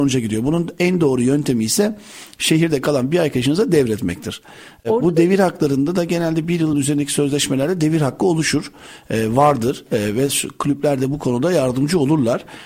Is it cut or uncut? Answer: uncut